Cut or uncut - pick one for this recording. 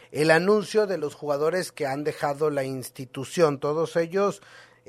uncut